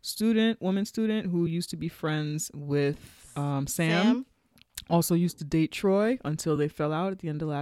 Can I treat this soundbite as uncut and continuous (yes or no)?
yes